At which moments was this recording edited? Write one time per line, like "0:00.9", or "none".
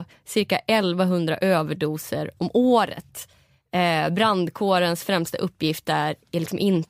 none